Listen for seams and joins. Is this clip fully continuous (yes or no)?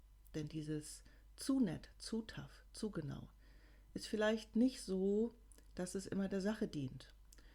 yes